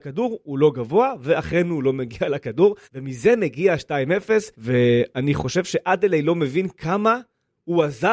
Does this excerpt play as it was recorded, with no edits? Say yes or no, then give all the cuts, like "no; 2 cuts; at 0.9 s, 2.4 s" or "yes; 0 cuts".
no; 2 cuts; at 2.8 s, 4.5 s